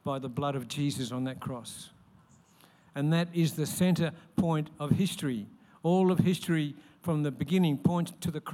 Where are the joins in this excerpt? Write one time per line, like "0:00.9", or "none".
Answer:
none